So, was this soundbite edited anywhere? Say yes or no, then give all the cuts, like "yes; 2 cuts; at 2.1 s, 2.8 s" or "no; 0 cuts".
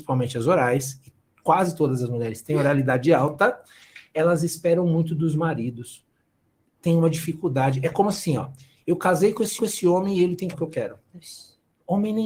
yes; 2 cuts; at 9.6 s, 10.5 s